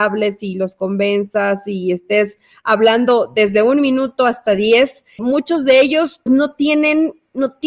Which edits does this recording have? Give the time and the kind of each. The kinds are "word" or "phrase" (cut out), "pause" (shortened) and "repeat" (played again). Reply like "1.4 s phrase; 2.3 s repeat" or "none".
5.2 s word; 6.3 s word